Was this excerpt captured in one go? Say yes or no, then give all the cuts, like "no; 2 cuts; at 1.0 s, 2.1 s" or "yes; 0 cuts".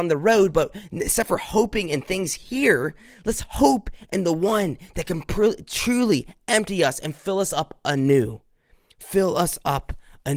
yes; 0 cuts